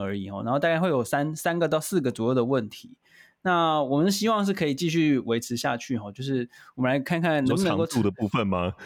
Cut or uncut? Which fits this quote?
uncut